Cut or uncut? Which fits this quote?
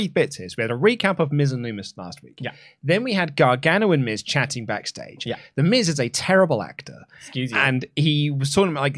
uncut